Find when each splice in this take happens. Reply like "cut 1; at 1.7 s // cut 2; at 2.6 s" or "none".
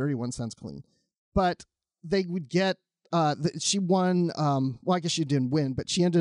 none